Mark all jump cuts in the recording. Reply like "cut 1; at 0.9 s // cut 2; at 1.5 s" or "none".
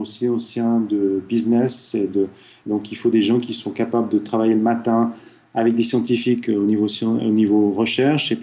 none